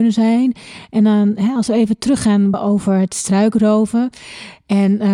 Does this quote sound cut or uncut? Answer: cut